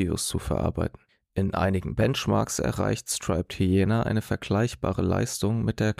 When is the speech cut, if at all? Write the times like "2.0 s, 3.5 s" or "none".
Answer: none